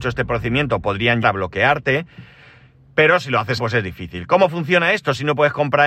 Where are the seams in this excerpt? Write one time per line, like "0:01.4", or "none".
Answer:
0:01.2
0:03.6